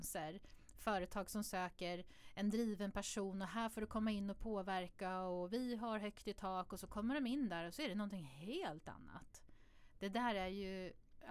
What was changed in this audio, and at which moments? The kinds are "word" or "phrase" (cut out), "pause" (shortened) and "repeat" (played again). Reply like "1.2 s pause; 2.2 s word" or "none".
none